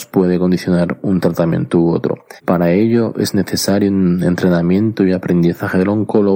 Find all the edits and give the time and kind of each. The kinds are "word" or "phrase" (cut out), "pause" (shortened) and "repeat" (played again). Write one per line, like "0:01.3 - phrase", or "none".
0:02.4 - pause